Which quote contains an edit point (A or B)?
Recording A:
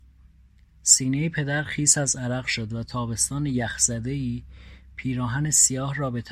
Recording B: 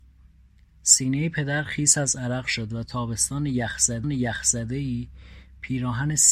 B